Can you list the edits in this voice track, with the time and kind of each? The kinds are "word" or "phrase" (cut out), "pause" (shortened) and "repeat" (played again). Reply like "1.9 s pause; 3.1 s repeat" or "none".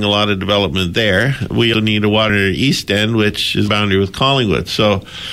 1.7 s word; 2.3 s word; 3.7 s phrase

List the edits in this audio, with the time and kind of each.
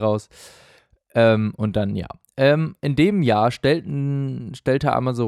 none

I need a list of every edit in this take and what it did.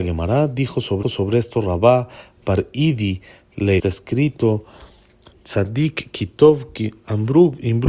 1.0 s repeat; 3.8 s phrase

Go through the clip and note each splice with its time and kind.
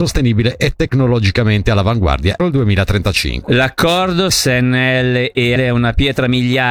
2.4 s word; 4.3 s word; 5.6 s word

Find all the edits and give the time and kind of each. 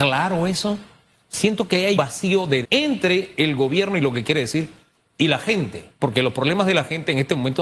2.0 s word; 2.6 s word

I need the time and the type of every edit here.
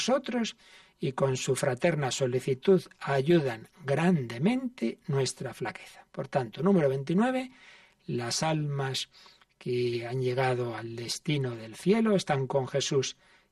none

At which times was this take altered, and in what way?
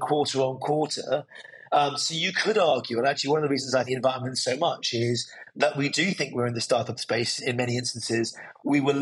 3.9 s phrase; 7.4 s word

